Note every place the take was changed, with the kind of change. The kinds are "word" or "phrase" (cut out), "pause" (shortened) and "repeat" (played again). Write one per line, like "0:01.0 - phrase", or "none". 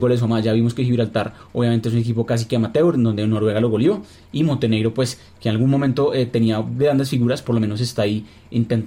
none